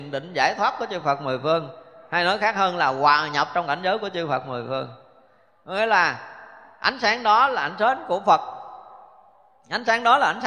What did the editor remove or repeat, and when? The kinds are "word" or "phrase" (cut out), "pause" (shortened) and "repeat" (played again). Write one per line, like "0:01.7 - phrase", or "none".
none